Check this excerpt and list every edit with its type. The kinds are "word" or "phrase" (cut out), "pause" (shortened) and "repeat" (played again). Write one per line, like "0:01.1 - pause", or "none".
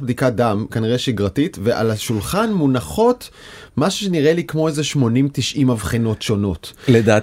none